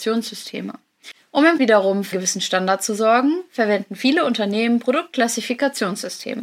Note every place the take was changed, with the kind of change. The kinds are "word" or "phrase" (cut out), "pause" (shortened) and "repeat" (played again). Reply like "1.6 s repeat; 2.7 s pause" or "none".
1.6 s word; 2.1 s word